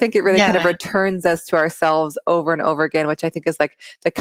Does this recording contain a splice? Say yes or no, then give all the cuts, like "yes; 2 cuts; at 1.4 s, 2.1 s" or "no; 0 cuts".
no; 0 cuts